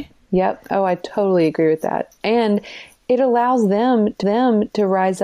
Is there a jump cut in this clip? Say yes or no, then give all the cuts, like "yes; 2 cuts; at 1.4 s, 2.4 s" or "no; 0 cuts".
yes; 1 cut; at 4.2 s